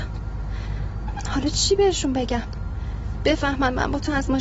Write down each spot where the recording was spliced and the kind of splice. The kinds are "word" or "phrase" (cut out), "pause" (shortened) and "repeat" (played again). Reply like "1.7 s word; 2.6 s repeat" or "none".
none